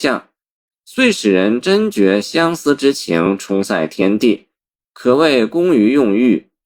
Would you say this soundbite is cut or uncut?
uncut